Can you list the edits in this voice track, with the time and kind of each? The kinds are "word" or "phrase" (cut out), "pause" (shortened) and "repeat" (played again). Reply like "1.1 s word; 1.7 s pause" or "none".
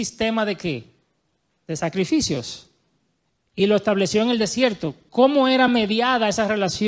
none